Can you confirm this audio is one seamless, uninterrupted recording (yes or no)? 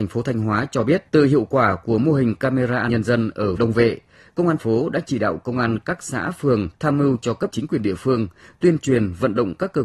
no